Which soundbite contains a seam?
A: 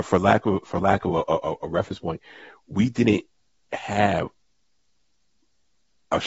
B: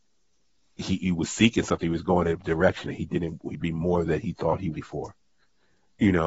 B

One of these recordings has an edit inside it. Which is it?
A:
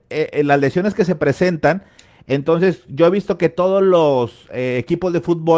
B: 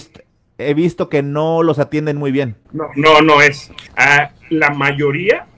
B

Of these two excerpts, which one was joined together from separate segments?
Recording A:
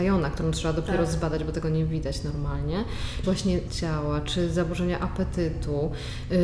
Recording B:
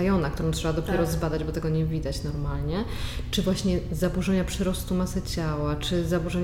A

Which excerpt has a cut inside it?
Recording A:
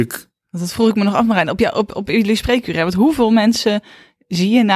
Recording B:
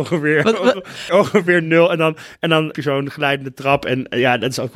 B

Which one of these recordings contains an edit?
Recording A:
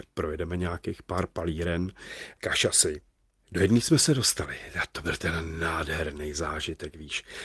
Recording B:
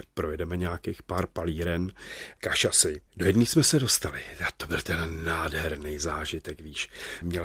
B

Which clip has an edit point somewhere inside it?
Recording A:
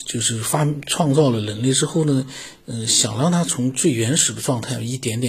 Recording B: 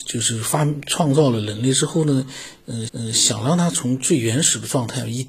B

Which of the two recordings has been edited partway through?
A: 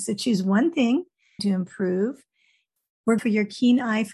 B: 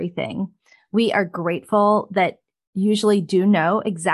A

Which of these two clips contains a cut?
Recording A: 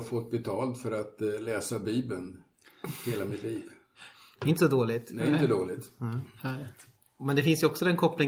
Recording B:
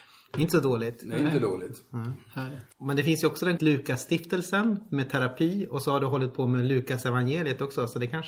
B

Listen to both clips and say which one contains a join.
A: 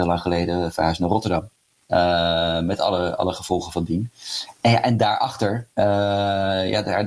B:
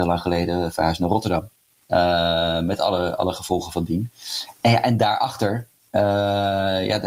A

